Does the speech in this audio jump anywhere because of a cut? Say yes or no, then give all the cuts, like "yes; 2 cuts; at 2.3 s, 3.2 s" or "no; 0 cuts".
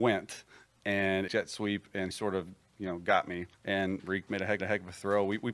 yes; 5 cuts; at 1.3 s, 2.1 s, 3.5 s, 4.3 s, 4.6 s